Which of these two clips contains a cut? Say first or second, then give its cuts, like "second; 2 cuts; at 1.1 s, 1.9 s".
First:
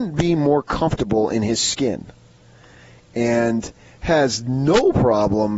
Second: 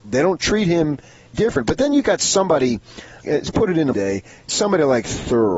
second; 4 cuts; at 1.3 s, 3.2 s, 3.9 s, 4.5 s